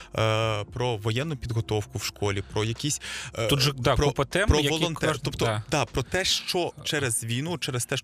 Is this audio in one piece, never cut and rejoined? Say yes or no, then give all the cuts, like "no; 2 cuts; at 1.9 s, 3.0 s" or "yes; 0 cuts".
yes; 0 cuts